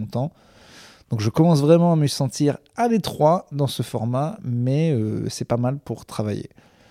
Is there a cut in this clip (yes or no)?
no